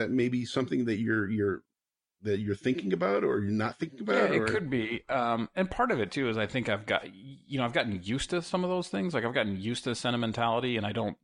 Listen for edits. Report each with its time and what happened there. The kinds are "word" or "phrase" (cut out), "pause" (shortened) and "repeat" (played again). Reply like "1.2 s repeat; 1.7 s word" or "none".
none